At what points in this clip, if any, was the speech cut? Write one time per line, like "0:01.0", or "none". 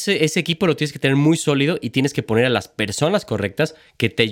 none